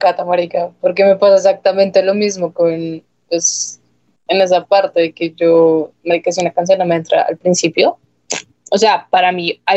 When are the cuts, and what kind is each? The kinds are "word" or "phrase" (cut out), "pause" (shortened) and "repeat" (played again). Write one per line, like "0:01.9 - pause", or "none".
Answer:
none